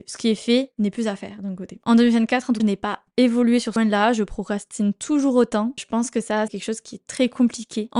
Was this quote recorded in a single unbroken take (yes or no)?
no